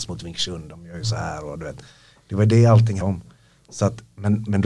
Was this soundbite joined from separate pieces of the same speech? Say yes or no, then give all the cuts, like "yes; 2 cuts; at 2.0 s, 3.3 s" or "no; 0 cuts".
yes; 1 cut; at 3.0 s